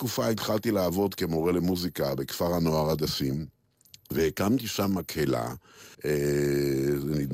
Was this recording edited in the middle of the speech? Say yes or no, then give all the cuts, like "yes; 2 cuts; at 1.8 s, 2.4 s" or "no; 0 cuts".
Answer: yes; 1 cut; at 5.9 s